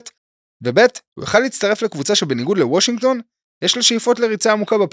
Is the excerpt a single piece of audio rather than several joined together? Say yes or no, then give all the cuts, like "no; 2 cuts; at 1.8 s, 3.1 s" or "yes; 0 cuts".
yes; 0 cuts